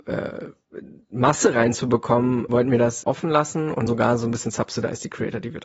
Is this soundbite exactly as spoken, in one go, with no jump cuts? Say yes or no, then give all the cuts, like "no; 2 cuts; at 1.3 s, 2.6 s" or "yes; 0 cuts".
no; 3 cuts; at 2.5 s, 3.0 s, 3.9 s